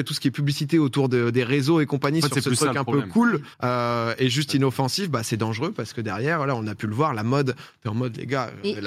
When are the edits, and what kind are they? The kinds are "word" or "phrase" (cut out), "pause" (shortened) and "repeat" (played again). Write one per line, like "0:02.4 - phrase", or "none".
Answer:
0:03.5 - pause